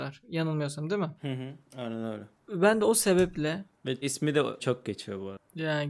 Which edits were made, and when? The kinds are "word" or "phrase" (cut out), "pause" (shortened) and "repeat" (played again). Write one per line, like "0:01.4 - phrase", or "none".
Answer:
0:01.2 - pause
0:04.0 - word
0:04.6 - word